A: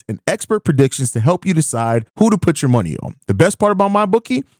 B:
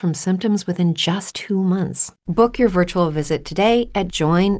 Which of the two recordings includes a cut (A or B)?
A